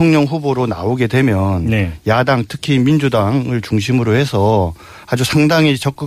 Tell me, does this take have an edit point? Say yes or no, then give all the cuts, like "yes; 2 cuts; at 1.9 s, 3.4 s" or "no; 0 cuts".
no; 0 cuts